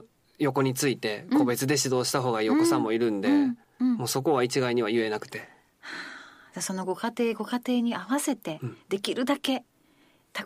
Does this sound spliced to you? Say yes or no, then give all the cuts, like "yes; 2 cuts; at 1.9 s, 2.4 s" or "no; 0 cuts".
no; 0 cuts